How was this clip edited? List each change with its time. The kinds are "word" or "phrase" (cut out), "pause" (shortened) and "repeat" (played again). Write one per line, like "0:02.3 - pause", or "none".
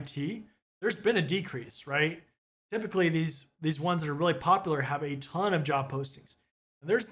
none